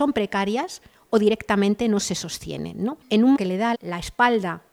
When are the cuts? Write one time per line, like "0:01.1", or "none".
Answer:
0:03.0
0:03.3
0:03.7

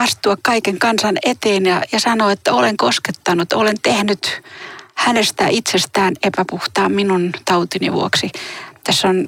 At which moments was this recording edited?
none

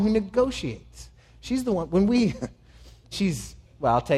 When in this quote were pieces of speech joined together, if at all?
0:03.1

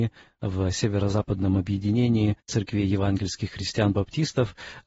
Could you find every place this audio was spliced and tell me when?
0:02.4

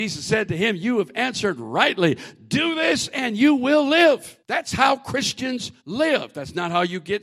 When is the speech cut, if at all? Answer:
0:04.4
0:05.8

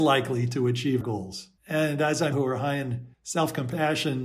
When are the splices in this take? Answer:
0:01.0
0:01.6
0:02.3
0:03.1

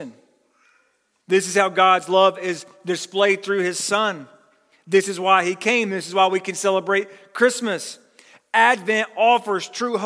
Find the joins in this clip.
none

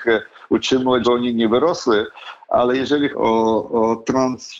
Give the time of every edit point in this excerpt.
0:01.0
0:03.1

